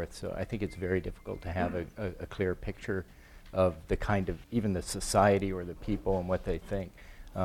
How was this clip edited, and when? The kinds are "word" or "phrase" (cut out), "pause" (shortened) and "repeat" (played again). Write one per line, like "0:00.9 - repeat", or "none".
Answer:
0:04.4 - pause